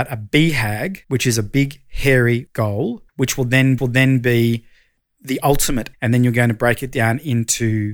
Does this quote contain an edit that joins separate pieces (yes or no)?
yes